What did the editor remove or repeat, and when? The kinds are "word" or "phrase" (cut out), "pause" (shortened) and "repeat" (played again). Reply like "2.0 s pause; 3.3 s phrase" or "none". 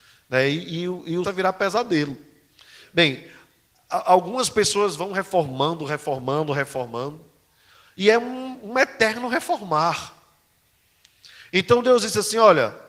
1.2 s phrase

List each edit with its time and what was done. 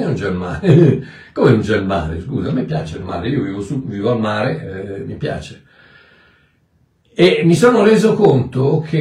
none

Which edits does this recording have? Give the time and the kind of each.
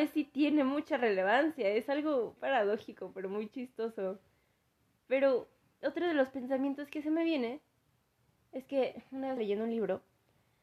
2.4 s word; 9.4 s word

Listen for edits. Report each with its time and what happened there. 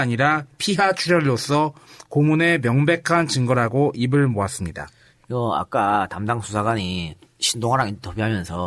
none

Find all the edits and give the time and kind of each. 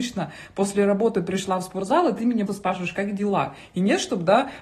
2.5 s word

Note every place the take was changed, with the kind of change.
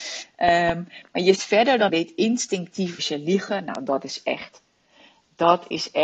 1.3 s word; 1.9 s phrase; 3.0 s word

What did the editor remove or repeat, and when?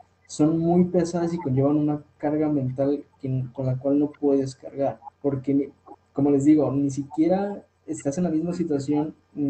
5.1 s pause

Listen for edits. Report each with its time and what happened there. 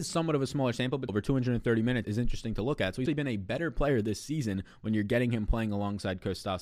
1.1 s word; 2.0 s word; 3.1 s word

